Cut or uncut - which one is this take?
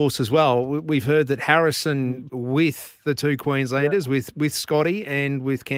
cut